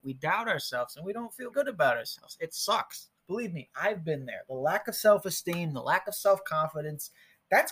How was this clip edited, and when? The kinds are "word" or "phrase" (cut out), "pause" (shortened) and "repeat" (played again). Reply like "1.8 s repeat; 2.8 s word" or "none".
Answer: 1.5 s word; 3.2 s pause